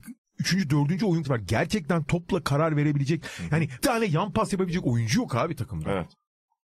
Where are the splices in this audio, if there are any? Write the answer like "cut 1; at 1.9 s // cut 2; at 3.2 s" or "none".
cut 1; at 1.2 s // cut 2; at 3.8 s